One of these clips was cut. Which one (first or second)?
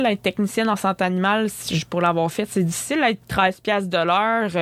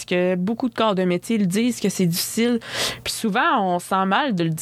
first